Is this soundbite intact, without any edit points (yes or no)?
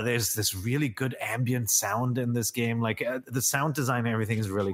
yes